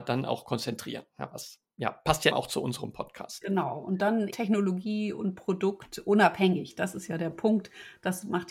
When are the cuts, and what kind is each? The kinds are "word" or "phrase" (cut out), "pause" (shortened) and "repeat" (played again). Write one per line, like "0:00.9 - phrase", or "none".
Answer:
0:02.3 - word
0:04.3 - word